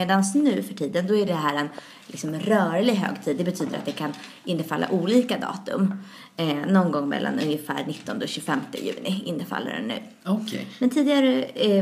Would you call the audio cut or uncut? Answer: uncut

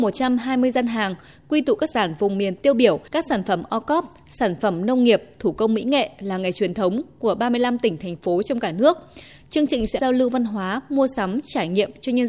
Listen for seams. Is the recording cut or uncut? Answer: cut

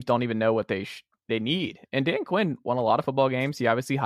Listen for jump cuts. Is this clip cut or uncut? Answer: uncut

